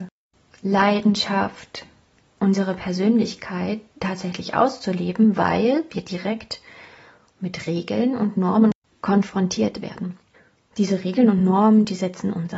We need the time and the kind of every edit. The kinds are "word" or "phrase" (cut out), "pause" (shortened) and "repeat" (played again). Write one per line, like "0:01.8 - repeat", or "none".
none